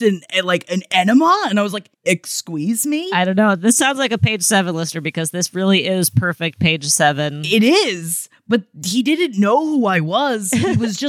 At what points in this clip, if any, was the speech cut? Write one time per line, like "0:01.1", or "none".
0:01.9